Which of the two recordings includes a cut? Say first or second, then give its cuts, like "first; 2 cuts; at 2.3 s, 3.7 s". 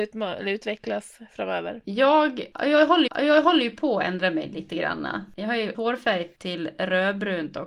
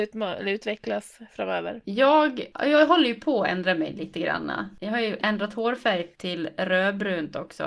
first; 2 cuts; at 3.1 s, 5.7 s